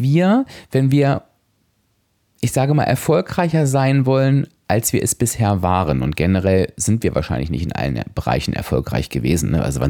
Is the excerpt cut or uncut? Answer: uncut